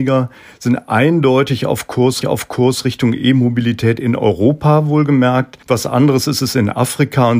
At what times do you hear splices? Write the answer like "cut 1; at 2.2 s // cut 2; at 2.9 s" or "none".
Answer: cut 1; at 2.2 s // cut 2; at 5.6 s